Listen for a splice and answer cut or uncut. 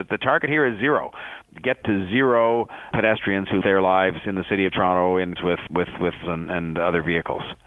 cut